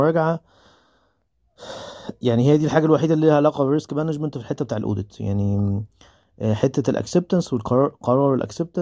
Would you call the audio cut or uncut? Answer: uncut